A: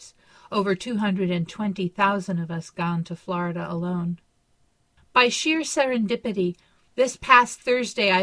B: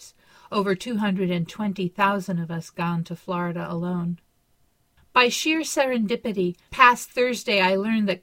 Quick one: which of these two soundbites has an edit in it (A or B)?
B